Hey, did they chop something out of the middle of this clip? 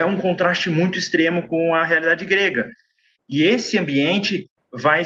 no; 0 cuts

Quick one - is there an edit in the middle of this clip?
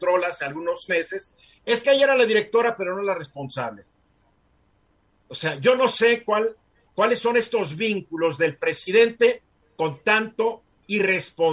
no; 0 cuts

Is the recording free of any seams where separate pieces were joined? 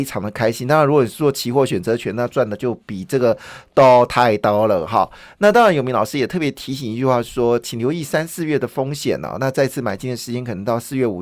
yes; 0 cuts

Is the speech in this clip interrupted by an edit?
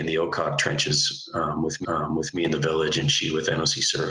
yes; 1 cut; at 1.8 s

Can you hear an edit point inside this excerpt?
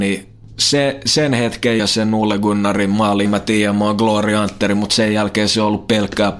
yes; 2 cuts; at 1.8 s, 3.2 s

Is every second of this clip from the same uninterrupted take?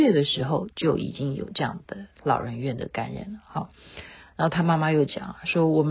yes; 0 cuts

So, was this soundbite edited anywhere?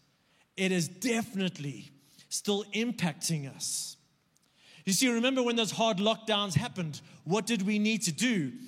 no; 0 cuts

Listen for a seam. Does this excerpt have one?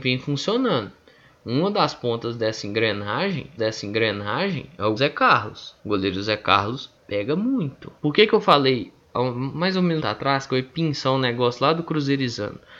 yes; 6 cuts; at 3.6 s, 5.0 s, 5.8 s, 7.0 s, 8.0 s, 10.0 s

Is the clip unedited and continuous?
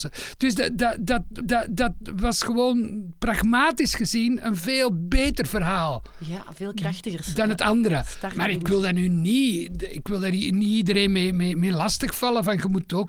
no; 1 cut; at 1.4 s

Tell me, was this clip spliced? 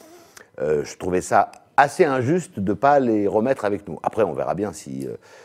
no; 0 cuts

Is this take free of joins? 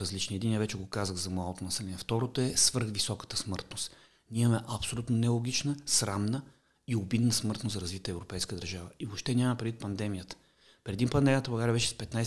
yes; 0 cuts

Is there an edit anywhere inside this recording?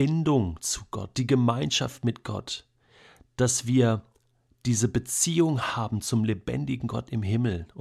no; 0 cuts

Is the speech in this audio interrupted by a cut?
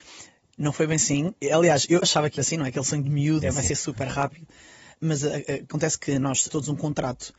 yes; 4 cuts; at 2.0 s, 2.4 s, 3.4 s, 6.5 s

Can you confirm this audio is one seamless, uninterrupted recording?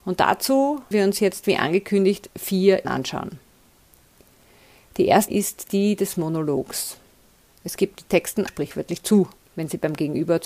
no; 5 cuts; at 0.9 s, 2.8 s, 5.3 s, 7.9 s, 8.5 s

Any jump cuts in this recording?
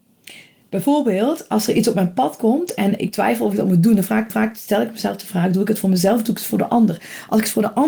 yes; 2 cuts; at 3.0 s, 4.3 s

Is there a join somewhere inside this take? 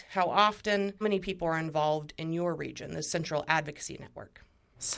yes; 1 cut; at 1.0 s

